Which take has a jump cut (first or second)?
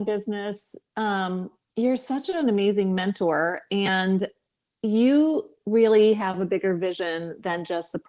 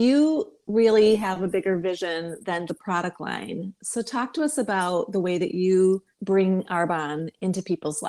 second